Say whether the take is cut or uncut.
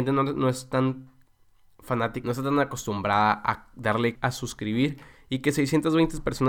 cut